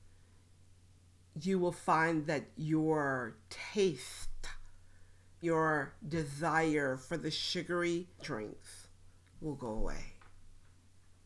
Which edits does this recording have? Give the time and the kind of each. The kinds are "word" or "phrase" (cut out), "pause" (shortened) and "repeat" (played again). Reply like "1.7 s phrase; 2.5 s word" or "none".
5.4 s word; 8.2 s word